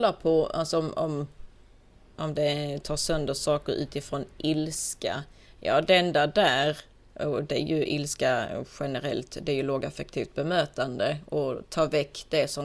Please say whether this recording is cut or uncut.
uncut